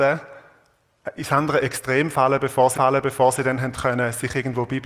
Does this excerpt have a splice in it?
yes; 1 cut; at 2.7 s

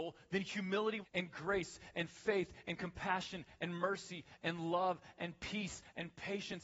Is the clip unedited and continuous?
no; 1 cut; at 1.0 s

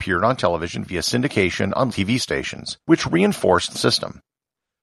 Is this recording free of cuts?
no; 3 cuts; at 1.9 s, 2.8 s, 3.7 s

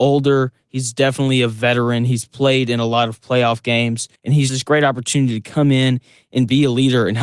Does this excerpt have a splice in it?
yes; 2 cuts; at 4.2 s, 4.5 s

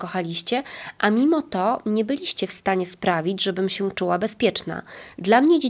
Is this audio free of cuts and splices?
yes; 0 cuts

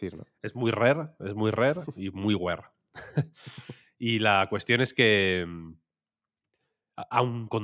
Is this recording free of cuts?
yes; 0 cuts

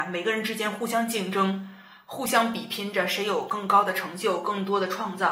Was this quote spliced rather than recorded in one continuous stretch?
no; 0 cuts

